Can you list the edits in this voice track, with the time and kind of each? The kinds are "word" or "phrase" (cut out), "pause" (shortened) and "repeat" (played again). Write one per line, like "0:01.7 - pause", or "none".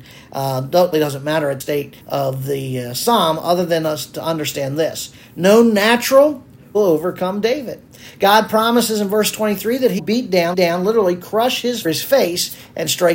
0:00.9 - word
0:01.6 - word
0:02.0 - pause
0:06.7 - phrase
0:10.0 - word
0:10.5 - repeat
0:11.8 - phrase